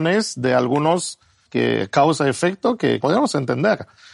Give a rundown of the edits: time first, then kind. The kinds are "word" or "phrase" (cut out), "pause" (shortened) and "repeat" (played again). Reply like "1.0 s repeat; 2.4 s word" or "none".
1.5 s word; 3.0 s phrase